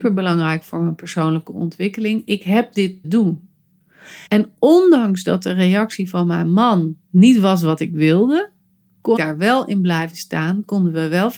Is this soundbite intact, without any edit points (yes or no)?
no